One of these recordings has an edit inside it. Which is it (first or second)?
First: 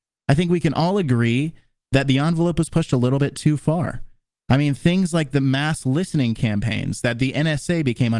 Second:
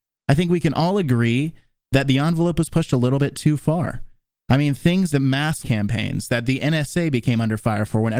second